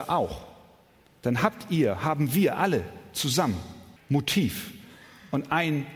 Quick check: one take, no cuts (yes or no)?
no